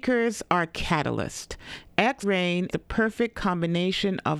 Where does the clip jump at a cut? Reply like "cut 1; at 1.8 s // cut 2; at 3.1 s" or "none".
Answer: cut 1; at 2.2 s // cut 2; at 2.7 s